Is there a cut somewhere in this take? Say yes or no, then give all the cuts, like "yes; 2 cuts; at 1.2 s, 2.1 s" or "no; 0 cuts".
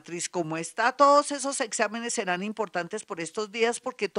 no; 0 cuts